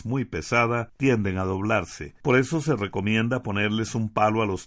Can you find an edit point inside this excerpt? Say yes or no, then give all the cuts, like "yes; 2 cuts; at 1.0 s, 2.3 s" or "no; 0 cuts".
no; 0 cuts